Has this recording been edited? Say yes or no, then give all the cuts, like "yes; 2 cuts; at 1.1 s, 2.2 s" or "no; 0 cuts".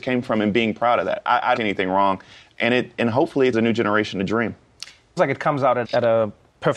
yes; 4 cuts; at 1.6 s, 3.5 s, 5.2 s, 5.8 s